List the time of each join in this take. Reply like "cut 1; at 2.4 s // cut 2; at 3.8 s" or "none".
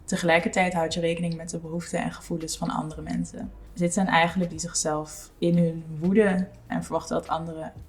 cut 1; at 4.5 s // cut 2; at 6.7 s